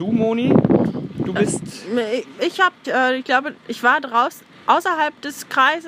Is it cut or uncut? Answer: cut